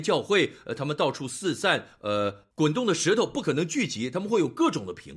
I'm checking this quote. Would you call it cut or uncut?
cut